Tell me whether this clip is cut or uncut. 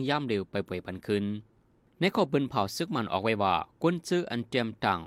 uncut